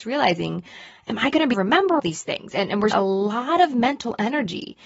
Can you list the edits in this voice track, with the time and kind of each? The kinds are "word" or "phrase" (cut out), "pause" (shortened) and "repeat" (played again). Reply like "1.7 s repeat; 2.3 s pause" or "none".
1.5 s phrase; 2.0 s word; 2.9 s word